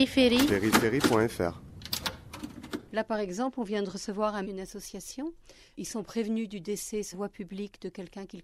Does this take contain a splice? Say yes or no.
yes